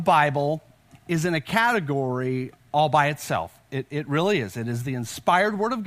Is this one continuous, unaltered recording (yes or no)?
yes